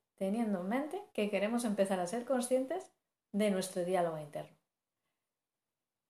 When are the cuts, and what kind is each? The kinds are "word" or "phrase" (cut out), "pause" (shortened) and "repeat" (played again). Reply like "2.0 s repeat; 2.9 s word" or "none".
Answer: 1.1 s pause; 3.1 s pause